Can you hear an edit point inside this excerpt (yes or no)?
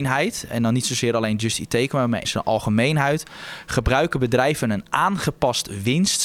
yes